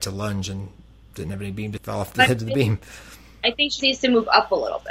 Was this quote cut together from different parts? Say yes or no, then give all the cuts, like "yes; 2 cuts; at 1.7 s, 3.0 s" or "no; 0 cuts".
yes; 2 cuts; at 1.8 s, 3.8 s